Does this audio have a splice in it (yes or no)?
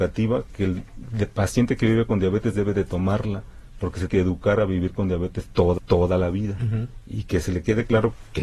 yes